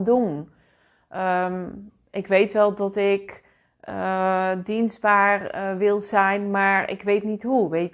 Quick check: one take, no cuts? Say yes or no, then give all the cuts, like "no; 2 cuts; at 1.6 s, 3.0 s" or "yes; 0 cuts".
yes; 0 cuts